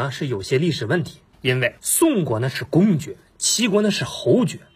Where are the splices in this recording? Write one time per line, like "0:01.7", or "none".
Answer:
0:01.3
0:01.8